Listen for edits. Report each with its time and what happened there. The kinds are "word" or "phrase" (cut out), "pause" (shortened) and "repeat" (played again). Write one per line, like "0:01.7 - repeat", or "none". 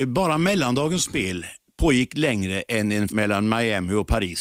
0:03.1 - word

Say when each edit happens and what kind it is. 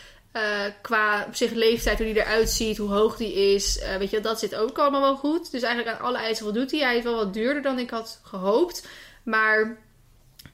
none

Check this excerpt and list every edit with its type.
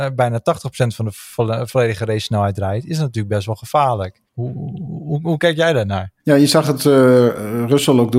0:04.3 - pause
0:06.2 - pause

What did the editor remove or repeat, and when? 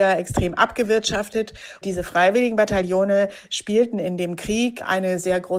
0:01.8 - word

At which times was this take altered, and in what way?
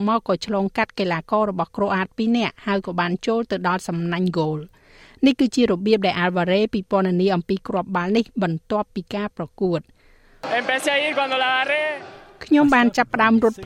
none

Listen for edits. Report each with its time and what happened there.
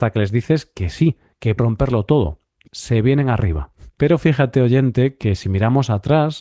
0:01.6 - word
0:02.7 - word
0:03.9 - pause

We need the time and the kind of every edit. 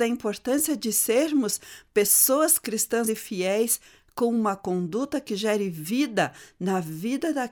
0:03.1 - word

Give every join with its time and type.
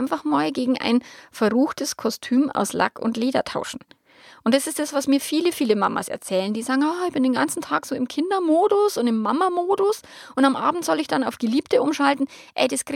none

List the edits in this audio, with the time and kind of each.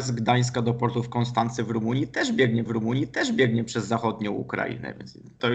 0:02.7 - repeat

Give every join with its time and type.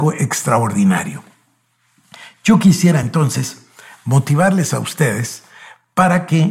none

